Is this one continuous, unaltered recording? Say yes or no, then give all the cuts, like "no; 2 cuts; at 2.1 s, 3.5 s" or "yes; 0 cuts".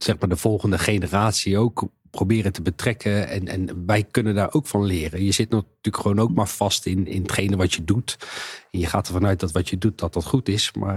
yes; 0 cuts